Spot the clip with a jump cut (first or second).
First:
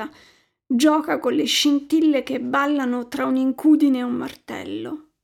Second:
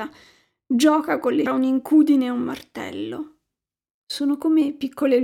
second